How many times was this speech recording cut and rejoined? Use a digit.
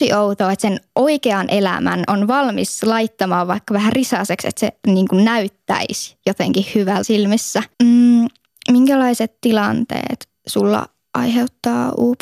2